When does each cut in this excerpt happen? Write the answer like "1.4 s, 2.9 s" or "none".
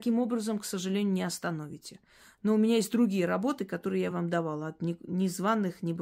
none